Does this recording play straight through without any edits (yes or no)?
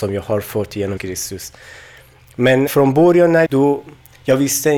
no